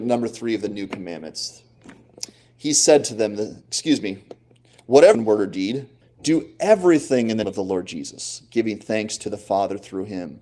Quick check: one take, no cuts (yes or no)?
no